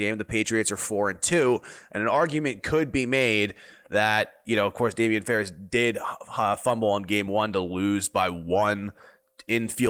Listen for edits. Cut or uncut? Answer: uncut